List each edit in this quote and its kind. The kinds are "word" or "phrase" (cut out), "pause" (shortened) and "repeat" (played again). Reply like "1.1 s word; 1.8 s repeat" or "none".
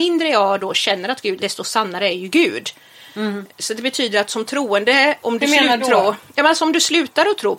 1.4 s phrase; 5.8 s word